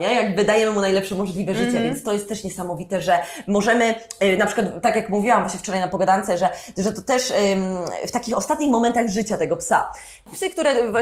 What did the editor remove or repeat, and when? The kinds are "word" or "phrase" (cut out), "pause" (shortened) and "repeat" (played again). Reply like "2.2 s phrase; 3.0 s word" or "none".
none